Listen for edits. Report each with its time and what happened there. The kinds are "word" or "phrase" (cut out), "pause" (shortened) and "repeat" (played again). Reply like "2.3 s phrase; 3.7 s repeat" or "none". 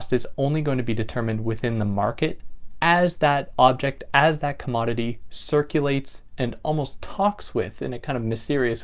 none